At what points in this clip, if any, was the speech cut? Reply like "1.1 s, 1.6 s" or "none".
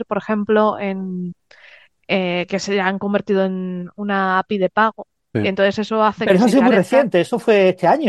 none